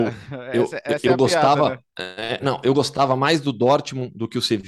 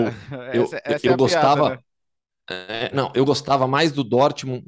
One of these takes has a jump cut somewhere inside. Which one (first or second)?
first